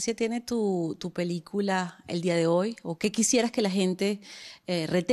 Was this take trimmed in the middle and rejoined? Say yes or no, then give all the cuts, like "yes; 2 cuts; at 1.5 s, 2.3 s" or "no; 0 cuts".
no; 0 cuts